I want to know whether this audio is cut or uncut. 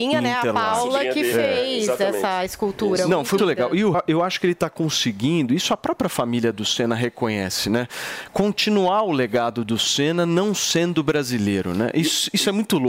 cut